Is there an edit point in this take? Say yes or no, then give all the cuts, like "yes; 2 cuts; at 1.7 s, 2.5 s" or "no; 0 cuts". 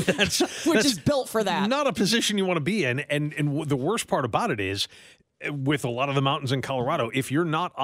no; 0 cuts